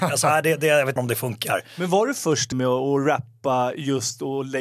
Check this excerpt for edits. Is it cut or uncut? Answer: cut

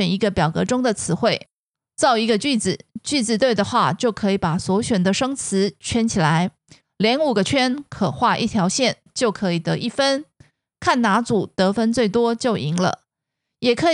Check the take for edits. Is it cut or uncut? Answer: uncut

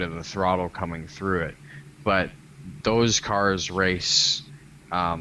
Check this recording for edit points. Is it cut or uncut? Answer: uncut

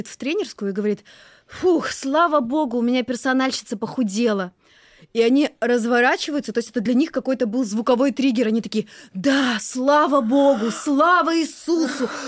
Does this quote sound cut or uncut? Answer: uncut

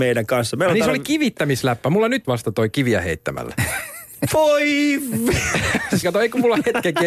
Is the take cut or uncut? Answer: cut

